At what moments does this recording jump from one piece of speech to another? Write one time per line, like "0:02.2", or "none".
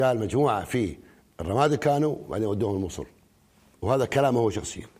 none